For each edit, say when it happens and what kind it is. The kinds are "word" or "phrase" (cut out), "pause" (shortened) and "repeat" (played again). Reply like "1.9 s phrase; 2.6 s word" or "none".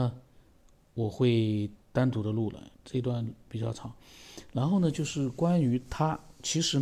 1.8 s pause; 2.7 s pause